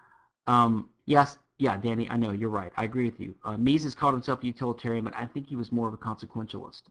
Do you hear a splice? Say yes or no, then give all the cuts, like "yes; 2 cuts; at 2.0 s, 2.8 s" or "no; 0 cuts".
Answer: yes; 1 cut; at 1.0 s